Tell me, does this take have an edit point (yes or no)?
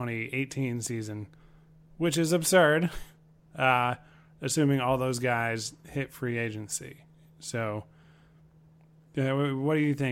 no